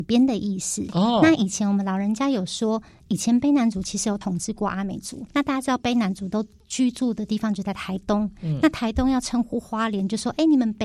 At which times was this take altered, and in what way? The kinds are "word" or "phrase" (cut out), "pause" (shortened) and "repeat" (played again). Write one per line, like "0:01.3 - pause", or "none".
0:05.3 - pause